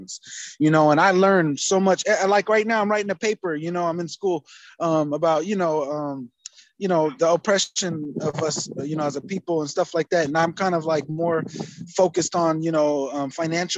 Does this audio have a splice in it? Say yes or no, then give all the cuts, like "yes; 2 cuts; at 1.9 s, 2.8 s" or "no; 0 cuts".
no; 0 cuts